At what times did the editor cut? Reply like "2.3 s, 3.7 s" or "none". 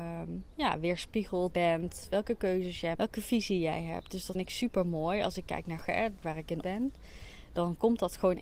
1.5 s, 2.9 s, 4.3 s, 5.8 s, 6.2 s, 6.6 s

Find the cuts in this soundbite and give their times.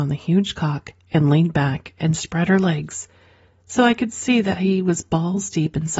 none

